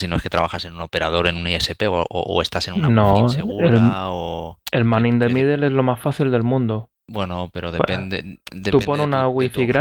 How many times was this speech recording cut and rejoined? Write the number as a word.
one